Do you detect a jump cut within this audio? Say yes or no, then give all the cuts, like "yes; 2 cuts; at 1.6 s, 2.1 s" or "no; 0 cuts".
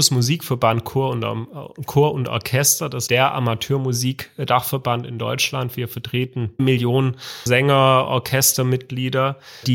yes; 3 cuts; at 3.1 s, 6.6 s, 7.5 s